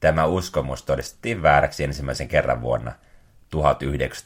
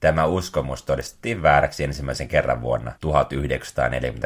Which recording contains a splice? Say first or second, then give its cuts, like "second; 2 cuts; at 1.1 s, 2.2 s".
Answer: second; 1 cut; at 3.0 s